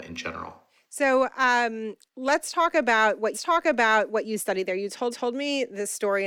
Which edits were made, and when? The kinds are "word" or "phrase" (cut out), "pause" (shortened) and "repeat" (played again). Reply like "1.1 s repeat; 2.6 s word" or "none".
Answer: 2.1 s pause; 3.3 s repeat; 5.1 s repeat